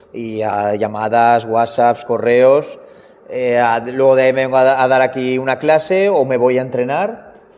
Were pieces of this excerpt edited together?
no; 0 cuts

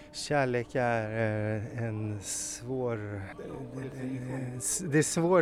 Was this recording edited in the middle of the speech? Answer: yes; 1 cut; at 3.3 s

